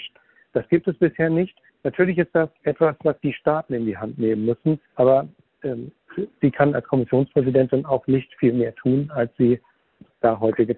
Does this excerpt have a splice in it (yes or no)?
yes